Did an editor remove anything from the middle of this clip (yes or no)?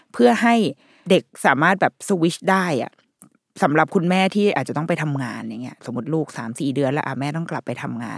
no